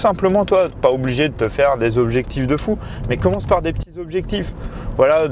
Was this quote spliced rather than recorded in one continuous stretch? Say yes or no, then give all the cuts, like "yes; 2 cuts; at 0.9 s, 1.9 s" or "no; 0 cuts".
no; 0 cuts